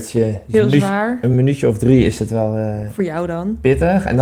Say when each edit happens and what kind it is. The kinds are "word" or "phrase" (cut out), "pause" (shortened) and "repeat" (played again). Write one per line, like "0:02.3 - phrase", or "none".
none